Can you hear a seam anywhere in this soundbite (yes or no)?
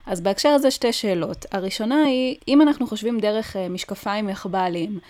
no